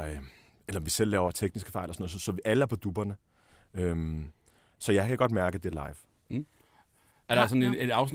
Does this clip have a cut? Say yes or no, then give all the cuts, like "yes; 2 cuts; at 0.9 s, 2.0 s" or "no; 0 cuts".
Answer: no; 0 cuts